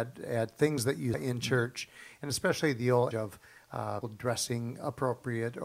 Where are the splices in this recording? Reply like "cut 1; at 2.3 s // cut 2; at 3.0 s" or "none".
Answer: cut 1; at 1.1 s // cut 2; at 3.1 s // cut 3; at 4.0 s